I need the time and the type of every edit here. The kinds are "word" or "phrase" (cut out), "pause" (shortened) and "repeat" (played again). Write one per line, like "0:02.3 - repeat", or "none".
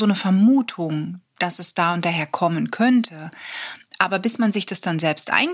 0:01.3 - pause